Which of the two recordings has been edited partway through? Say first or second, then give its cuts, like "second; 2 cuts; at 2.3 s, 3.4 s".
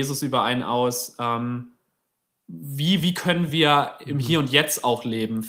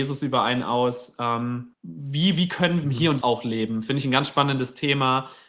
second; 3 cuts; at 1.7 s, 2.8 s, 3.2 s